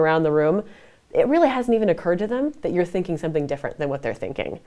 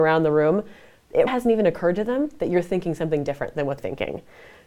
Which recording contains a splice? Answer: second; 2 cuts; at 1.3 s, 3.8 s

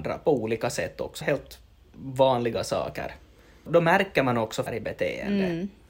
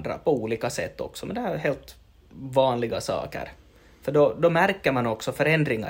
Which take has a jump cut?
first; 3 cuts; at 1.2 s, 3.7 s, 4.7 s

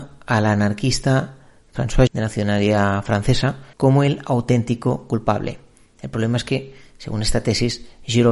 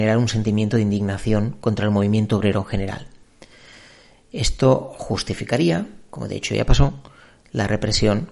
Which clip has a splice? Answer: first; 2 cuts; at 2.1 s, 3.7 s

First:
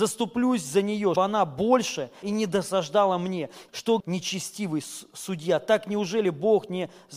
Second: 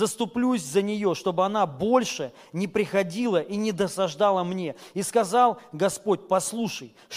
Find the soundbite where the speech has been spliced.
first; 4 cuts; at 1.2 s, 2.2 s, 3.7 s, 4.0 s

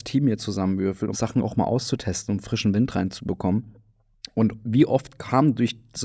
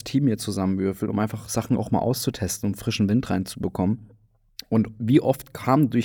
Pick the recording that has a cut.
first; 1 cut; at 1.1 s

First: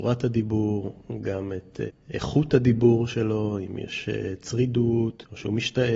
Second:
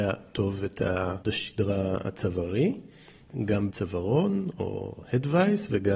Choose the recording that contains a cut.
second; 2 cuts; at 1.2 s, 3.7 s

